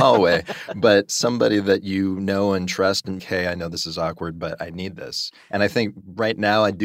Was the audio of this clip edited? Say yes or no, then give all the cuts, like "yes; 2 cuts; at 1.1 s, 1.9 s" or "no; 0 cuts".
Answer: yes; 1 cut; at 3.2 s